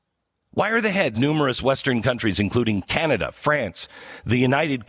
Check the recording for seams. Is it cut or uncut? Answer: cut